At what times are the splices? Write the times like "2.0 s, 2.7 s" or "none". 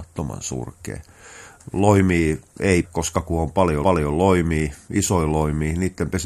2.8 s, 3.8 s